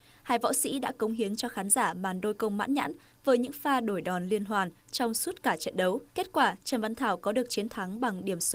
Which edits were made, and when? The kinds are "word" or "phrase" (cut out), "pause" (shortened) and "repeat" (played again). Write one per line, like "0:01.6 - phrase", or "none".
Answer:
0:06.1 - pause